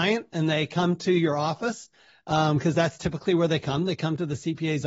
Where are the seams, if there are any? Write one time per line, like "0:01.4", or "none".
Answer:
none